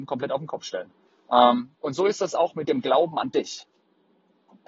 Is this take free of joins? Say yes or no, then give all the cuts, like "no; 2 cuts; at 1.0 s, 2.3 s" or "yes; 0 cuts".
no; 1 cut; at 1.1 s